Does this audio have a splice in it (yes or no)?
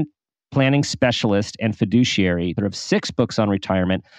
yes